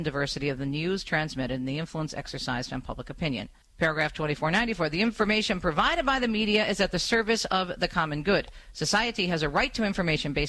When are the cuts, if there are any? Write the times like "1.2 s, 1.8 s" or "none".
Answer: 3.6 s